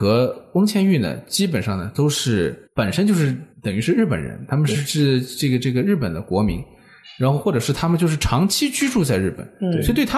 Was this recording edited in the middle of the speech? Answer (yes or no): yes